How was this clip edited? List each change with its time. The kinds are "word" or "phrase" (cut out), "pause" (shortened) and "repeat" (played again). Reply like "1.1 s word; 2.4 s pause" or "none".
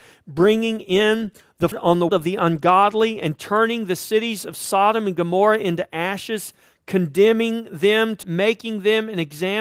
1.7 s word; 2.1 s word; 8.2 s word